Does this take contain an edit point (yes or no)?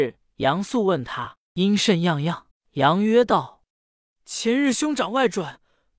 yes